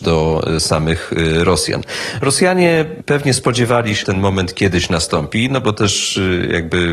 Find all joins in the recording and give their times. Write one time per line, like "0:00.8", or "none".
0:04.0